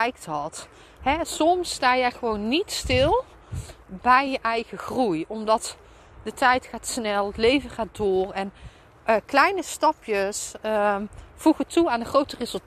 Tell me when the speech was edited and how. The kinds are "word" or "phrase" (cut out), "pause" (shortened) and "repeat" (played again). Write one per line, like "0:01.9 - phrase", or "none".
none